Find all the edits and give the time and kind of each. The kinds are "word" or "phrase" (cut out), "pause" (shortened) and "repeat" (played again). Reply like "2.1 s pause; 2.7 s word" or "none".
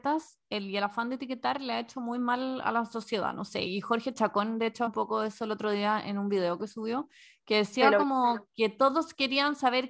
4.9 s word